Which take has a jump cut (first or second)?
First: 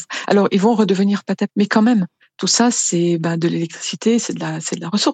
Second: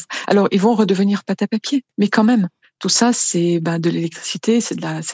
first